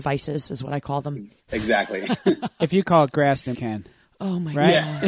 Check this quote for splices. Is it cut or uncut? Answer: cut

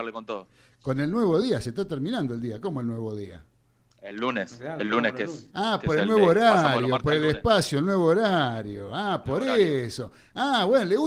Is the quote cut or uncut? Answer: uncut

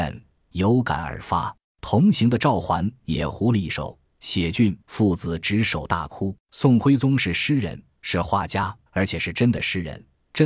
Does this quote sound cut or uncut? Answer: cut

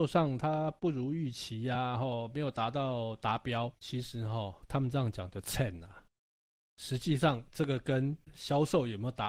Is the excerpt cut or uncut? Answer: uncut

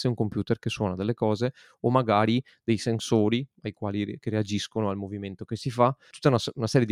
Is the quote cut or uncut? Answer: uncut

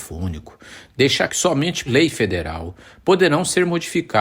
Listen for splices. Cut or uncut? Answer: cut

